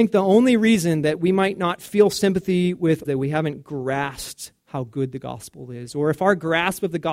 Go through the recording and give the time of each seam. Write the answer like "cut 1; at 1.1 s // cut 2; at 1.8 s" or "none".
cut 1; at 3.1 s // cut 2; at 4.6 s